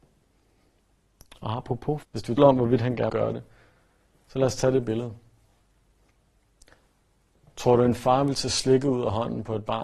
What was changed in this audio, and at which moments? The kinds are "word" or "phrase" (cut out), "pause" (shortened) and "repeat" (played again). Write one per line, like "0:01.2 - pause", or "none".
0:02.0 - word
0:02.4 - word
0:03.1 - word